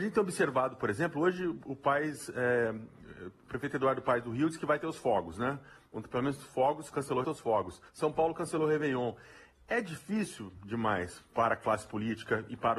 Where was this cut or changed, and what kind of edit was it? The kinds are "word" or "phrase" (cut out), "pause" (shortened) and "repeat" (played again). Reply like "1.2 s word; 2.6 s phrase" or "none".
7.2 s phrase; 7.9 s pause